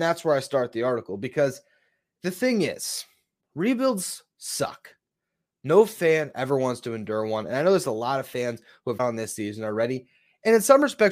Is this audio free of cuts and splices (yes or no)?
no